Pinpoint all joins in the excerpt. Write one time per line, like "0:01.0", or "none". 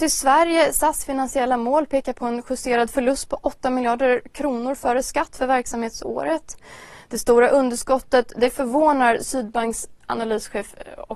none